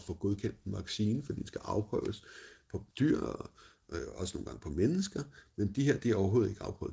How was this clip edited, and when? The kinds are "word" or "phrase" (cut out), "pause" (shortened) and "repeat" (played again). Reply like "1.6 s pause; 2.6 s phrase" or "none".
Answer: 2.9 s pause